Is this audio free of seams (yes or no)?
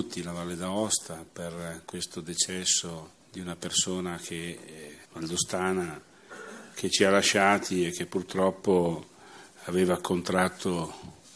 no